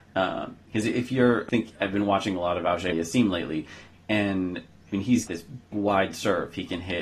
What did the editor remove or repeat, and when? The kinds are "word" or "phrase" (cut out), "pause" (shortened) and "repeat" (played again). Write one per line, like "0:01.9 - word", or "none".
0:01.5 - word
0:02.9 - word
0:05.3 - word
0:05.7 - word